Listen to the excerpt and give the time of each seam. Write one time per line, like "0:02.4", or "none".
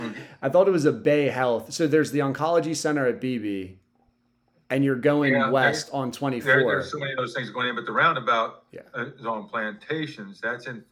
0:04.1